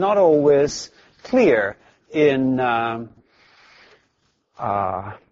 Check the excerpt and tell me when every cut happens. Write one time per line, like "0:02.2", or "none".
none